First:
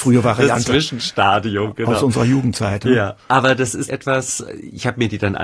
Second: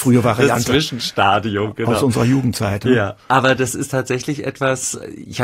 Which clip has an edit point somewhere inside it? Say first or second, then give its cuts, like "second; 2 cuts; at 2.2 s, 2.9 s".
first; 1 cut; at 3.9 s